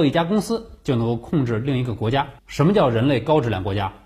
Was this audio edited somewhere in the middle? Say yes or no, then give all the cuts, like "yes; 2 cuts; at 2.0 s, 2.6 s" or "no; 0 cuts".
yes; 1 cut; at 2.4 s